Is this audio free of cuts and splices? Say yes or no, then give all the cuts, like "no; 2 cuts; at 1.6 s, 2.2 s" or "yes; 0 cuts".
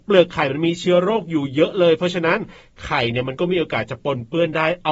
yes; 0 cuts